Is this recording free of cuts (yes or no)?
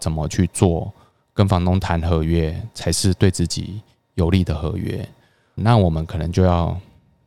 no